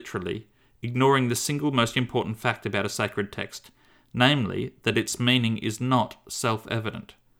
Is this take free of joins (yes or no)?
yes